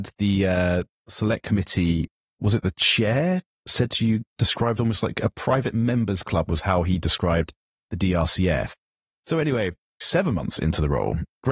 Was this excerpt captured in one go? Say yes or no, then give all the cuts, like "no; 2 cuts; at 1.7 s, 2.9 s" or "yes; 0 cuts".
yes; 0 cuts